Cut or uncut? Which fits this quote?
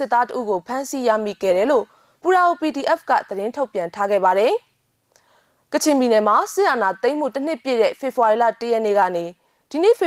uncut